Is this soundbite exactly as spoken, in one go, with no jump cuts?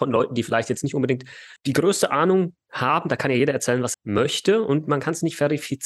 no; 2 cuts; at 1.6 s, 3.9 s

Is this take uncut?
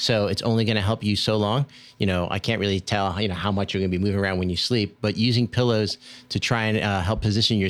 yes; 0 cuts

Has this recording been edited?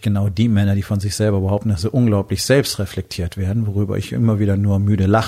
no; 0 cuts

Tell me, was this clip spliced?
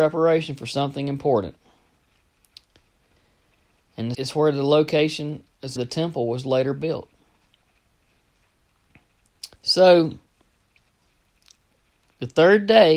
yes; 3 cuts; at 4.1 s, 5.8 s, 9.6 s

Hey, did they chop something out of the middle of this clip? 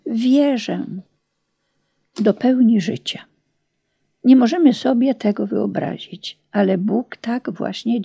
no; 0 cuts

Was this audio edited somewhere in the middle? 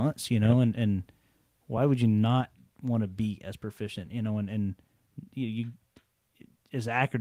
no; 0 cuts

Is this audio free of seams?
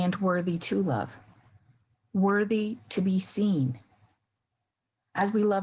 yes; 0 cuts

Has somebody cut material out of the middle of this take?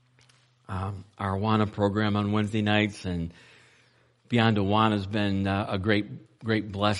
no; 0 cuts

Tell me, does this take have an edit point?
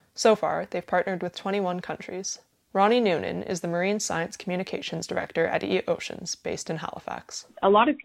no; 0 cuts

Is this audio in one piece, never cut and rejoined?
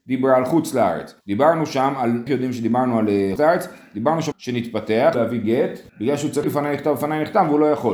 no; 7 cuts; at 1.2 s, 2.3 s, 3.4 s, 4.3 s, 5.1 s, 5.9 s, 6.4 s

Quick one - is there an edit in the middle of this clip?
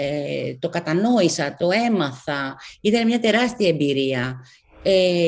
no; 0 cuts

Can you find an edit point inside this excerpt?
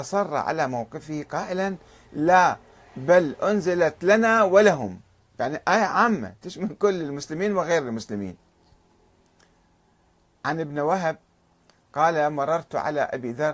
no; 0 cuts

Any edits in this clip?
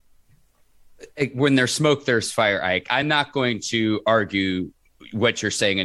no; 0 cuts

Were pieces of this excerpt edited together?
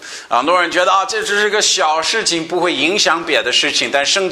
no; 0 cuts

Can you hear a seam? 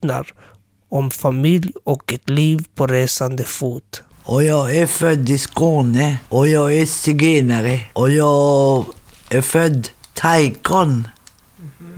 yes; 3 cuts; at 4.1 s, 6.3 s, 7.9 s

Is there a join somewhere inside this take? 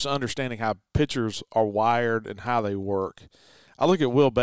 no; 0 cuts

